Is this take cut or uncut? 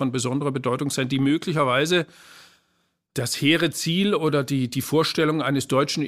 uncut